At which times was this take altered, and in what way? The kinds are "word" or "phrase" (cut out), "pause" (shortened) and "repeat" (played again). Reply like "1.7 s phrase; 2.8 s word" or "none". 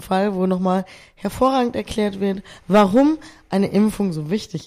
none

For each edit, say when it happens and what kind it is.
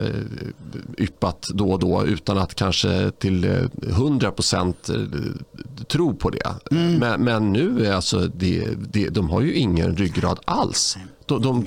none

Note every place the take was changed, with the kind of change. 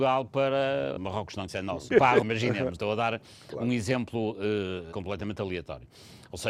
1.0 s word; 1.5 s word; 1.9 s word; 2.2 s word; 2.7 s word; 4.9 s word

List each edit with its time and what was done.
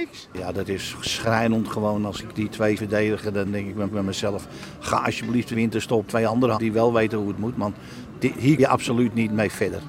2.8 s word; 3.5 s word; 3.9 s repeat; 5.5 s word; 6.1 s word; 6.6 s word; 8.6 s word

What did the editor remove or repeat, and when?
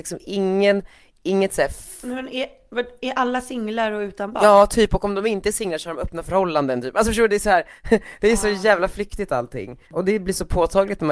9.8 s pause

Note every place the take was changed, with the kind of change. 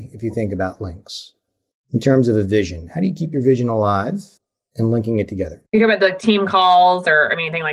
4.4 s pause; 5.7 s pause

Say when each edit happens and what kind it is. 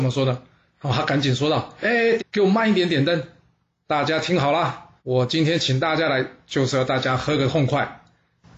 2.2 s phrase; 5.0 s pause

